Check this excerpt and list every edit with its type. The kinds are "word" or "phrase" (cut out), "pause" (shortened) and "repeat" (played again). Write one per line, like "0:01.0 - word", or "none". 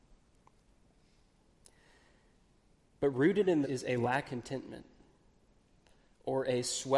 0:03.6 - word
0:04.2 - word